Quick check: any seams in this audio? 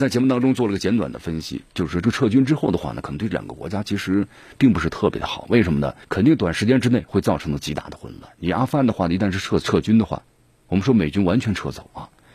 yes; 1 cut; at 6.0 s

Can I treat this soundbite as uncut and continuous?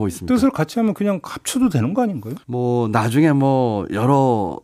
no; 1 cut; at 2.4 s

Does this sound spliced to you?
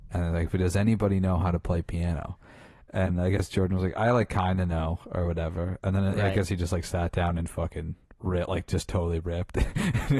no; 0 cuts

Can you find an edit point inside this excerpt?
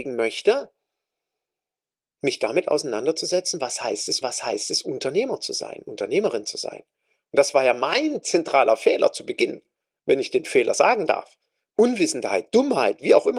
yes; 1 cut; at 4.2 s

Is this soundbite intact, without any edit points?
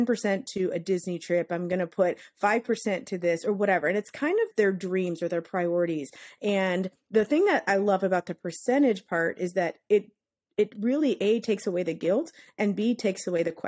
no; 1 cut; at 4.5 s

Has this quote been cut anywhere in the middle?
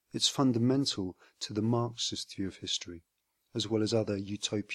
no; 0 cuts

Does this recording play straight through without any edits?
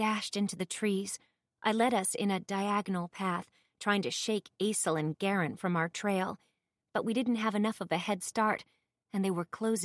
yes; 0 cuts

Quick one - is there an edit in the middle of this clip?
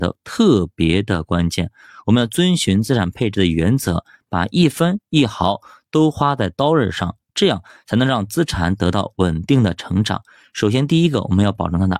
no; 0 cuts

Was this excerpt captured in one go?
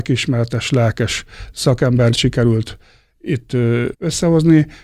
no; 2 cuts; at 2.1 s, 3.9 s

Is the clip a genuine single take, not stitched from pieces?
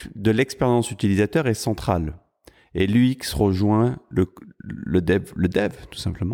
yes; 0 cuts

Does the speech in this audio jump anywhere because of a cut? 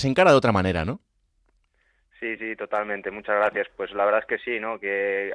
no; 0 cuts

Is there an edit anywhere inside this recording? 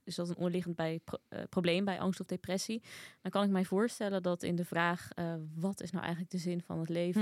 no; 0 cuts

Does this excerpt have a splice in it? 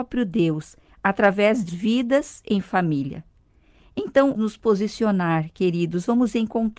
yes; 2 cuts; at 1.7 s, 4.4 s

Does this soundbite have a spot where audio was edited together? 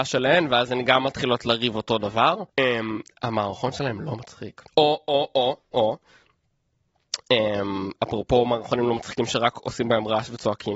yes; 2 cuts; at 2.5 s, 4.7 s

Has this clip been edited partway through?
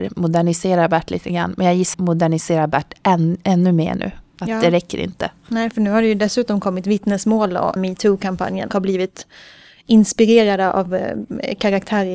yes; 3 cuts; at 1.9 s, 7.8 s, 8.7 s

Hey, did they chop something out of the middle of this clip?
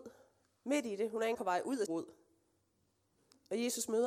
yes; 2 cuts; at 1.3 s, 1.9 s

